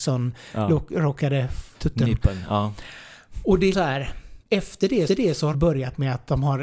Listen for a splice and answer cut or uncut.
cut